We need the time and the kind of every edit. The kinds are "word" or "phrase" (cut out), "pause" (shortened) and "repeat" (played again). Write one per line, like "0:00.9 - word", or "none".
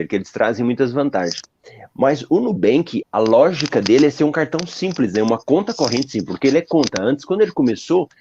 0:03.0 - word